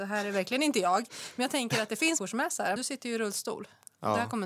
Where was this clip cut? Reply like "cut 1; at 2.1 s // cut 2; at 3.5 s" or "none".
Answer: cut 1; at 2.2 s // cut 2; at 2.8 s